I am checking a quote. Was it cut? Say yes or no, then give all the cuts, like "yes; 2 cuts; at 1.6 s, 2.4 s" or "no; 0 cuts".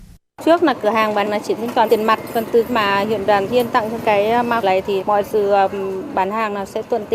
yes; 7 cuts; at 1.3 s, 1.9 s, 2.7 s, 3.5 s, 4.0 s, 4.6 s, 5.0 s